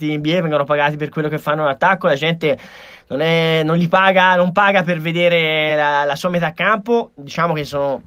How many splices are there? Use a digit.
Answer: 0